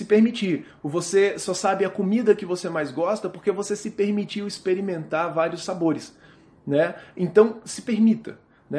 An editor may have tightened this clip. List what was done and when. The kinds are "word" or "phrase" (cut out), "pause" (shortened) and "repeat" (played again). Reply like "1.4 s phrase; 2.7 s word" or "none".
none